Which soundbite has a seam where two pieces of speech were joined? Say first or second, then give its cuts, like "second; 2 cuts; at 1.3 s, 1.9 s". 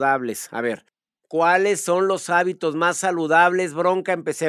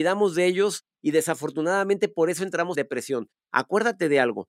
second; 1 cut; at 2.7 s